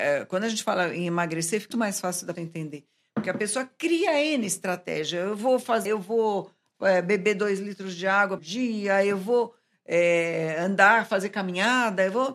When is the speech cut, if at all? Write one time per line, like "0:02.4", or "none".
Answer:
0:01.7
0:02.4
0:05.9
0:08.4